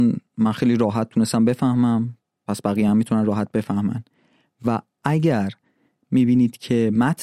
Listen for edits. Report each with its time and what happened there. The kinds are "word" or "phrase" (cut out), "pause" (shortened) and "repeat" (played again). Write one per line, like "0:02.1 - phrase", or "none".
none